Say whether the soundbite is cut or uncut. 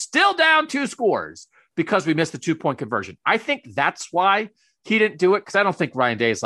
uncut